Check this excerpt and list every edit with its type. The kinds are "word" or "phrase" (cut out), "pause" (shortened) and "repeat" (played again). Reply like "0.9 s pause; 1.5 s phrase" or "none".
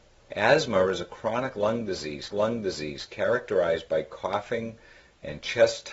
2.3 s repeat